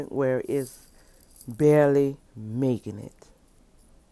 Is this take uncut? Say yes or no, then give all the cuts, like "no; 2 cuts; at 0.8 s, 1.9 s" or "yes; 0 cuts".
no; 1 cut; at 2.3 s